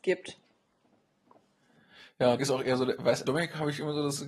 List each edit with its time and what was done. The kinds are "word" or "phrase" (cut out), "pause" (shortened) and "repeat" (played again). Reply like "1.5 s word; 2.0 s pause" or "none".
2.4 s word; 3.2 s word